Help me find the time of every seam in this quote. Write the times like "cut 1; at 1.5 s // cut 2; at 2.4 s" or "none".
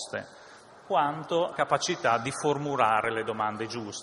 cut 1; at 1.5 s